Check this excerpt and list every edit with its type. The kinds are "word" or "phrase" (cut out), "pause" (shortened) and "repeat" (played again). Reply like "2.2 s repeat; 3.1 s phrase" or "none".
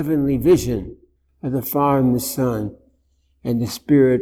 1.2 s pause

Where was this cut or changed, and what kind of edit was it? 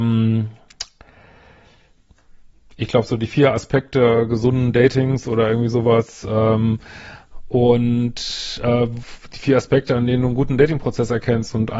none

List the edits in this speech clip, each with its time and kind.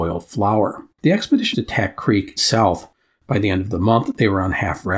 0.9 s pause; 1.5 s word; 2.4 s phrase

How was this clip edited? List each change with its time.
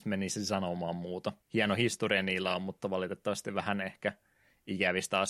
1.4 s pause

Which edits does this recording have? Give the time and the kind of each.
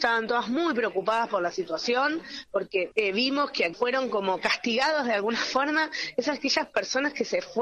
2.9 s word; 3.7 s word

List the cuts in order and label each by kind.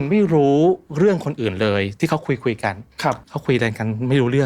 3.2 s pause

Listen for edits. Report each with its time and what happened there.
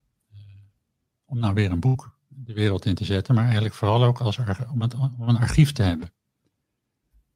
none

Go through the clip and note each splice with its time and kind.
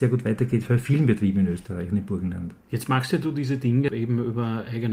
none

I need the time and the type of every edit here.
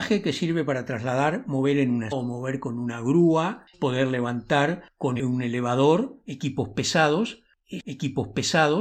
2.1 s word; 3.7 s phrase; 5.2 s word; 7.8 s repeat

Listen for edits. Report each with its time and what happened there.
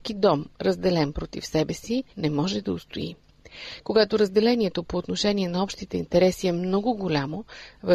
2.1 s pause

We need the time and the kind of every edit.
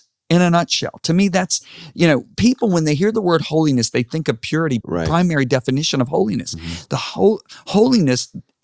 4.8 s phrase

